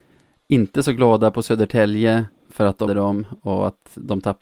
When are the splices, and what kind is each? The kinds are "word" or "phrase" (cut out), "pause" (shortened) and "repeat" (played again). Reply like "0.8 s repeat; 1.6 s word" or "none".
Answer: 2.4 s pause; 2.9 s word